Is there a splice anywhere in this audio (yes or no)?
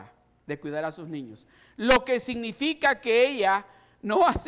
no